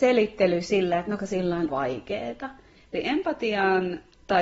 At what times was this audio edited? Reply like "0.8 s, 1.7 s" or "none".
1.2 s, 1.7 s